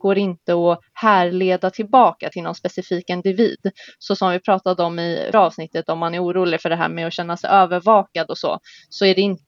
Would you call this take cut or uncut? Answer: cut